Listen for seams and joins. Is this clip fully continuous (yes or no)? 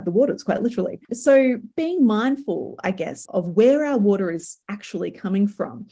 no